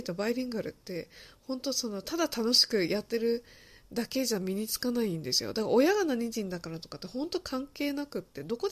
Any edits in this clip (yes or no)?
no